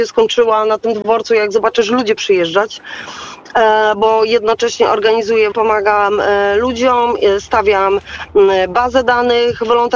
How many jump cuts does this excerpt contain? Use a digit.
2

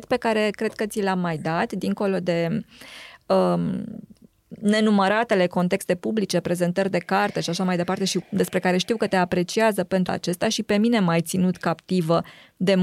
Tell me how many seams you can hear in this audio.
2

